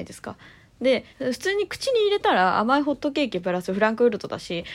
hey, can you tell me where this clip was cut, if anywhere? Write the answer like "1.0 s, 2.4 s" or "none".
1.1 s